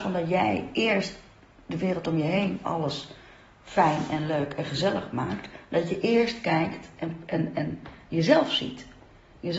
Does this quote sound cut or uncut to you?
uncut